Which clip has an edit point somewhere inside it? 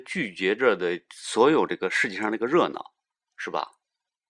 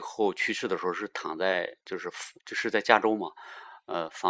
second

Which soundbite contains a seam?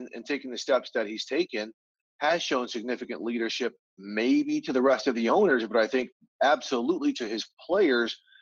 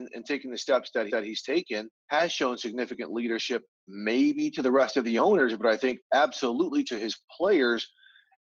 second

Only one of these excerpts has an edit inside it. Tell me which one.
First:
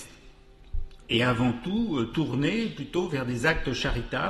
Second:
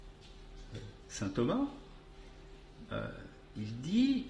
second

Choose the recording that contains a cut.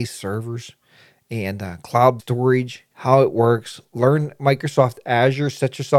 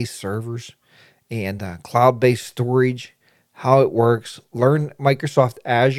first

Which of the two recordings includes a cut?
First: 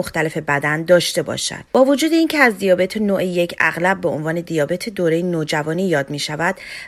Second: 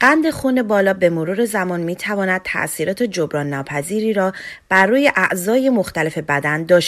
first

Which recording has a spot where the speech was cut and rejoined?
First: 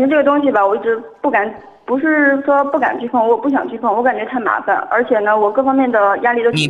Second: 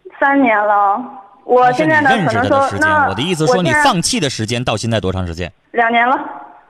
second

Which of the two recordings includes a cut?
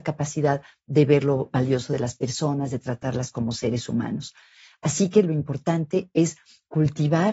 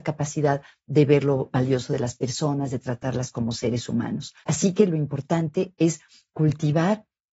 second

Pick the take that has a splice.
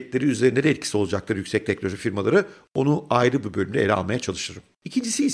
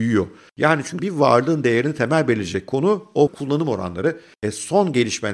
second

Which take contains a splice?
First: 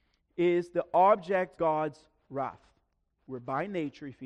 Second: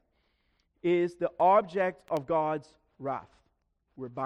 first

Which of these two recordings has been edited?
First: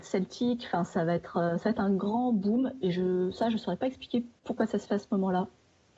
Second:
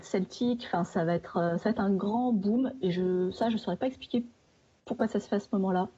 first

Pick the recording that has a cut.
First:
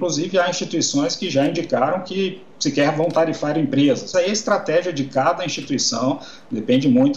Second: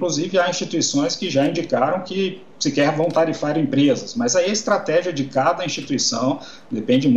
first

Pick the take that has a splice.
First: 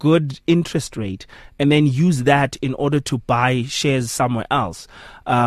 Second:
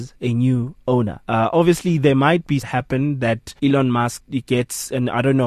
second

